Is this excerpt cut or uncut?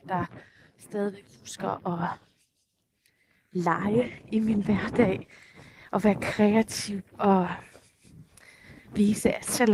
uncut